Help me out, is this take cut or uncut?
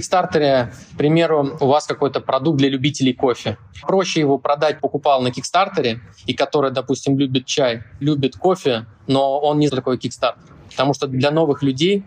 cut